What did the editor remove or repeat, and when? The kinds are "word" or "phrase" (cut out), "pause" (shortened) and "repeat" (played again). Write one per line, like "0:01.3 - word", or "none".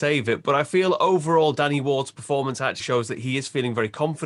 0:02.8 - word